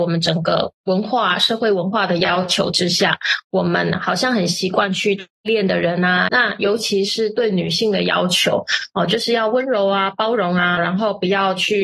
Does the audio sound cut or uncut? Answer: cut